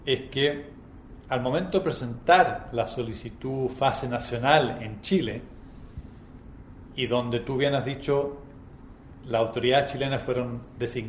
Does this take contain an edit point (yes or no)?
no